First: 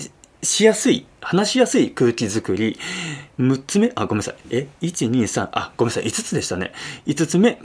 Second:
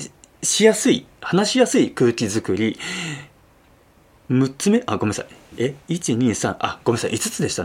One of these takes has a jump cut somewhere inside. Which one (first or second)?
first